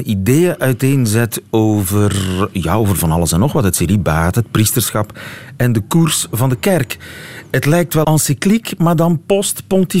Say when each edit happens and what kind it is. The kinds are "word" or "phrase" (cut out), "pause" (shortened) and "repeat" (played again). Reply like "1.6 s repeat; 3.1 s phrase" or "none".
8.0 s word